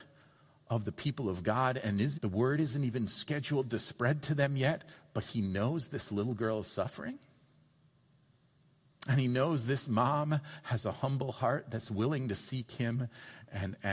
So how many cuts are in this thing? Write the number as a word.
one